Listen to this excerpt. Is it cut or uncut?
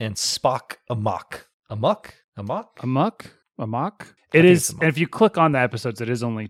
uncut